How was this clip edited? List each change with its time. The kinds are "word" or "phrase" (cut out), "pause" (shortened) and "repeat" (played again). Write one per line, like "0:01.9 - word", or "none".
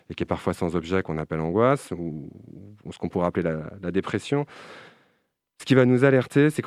none